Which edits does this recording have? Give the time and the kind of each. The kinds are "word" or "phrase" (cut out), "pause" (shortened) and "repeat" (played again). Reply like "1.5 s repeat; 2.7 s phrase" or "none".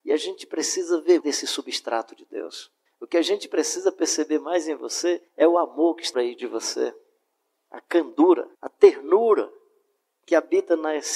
1.2 s word; 2.9 s pause; 5.3 s pause; 6.1 s word; 8.5 s pause